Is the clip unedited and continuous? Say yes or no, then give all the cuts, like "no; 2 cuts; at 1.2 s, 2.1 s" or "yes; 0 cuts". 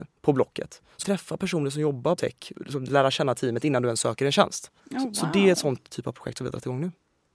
no; 5 cuts; at 1.0 s, 2.2 s, 2.5 s, 4.8 s, 5.9 s